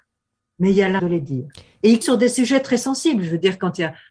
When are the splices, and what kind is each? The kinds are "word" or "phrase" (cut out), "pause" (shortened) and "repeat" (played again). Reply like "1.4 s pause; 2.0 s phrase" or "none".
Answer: 1.0 s word; 2.0 s word